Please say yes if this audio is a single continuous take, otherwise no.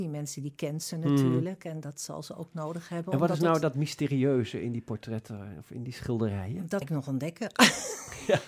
no